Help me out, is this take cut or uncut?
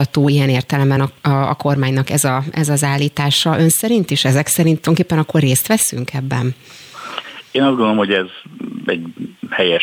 uncut